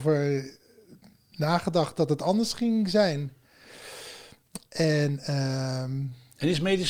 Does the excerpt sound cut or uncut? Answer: uncut